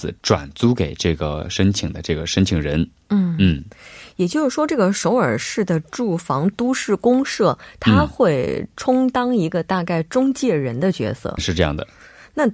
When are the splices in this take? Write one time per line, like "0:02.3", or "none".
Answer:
0:11.4